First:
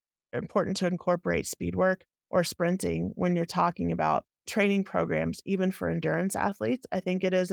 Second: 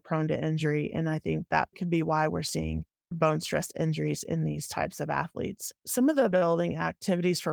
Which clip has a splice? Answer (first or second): second